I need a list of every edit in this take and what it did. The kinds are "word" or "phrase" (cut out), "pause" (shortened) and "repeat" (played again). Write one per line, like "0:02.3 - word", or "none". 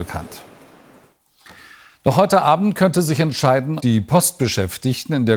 0:03.8 - word